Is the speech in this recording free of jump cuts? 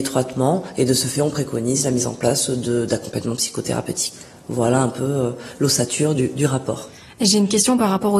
yes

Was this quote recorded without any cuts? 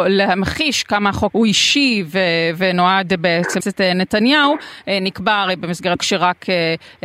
no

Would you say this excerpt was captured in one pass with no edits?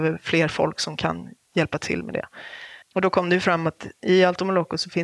no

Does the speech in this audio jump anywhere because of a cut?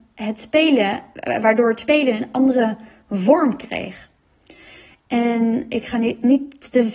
no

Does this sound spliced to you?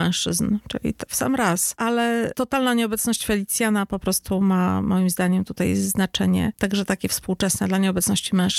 no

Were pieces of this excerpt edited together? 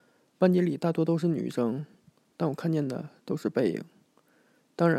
no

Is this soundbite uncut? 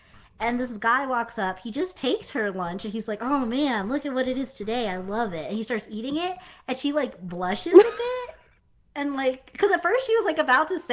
yes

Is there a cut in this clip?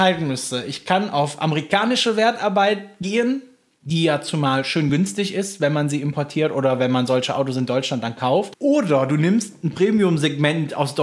no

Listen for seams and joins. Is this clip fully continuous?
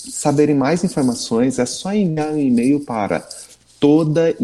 yes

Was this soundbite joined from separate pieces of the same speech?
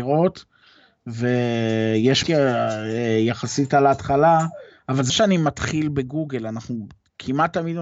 yes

